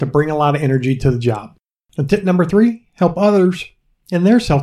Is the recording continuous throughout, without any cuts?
yes; 0 cuts

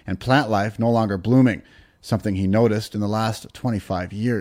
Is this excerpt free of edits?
yes; 0 cuts

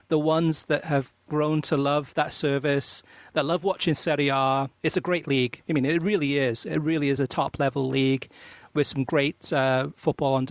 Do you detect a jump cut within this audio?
no; 0 cuts

